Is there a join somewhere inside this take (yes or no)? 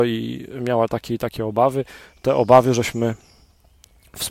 no